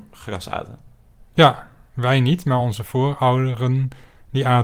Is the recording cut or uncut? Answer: uncut